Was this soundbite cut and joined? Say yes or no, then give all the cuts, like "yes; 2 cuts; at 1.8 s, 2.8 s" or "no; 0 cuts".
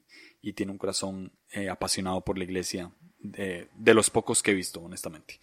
no; 0 cuts